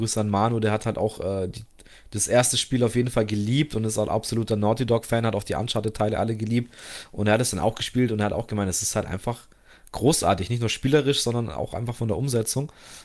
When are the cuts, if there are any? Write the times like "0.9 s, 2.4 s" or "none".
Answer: none